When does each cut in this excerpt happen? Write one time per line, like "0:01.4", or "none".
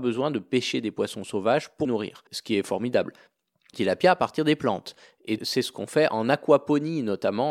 0:01.8
0:02.3
0:03.7
0:05.4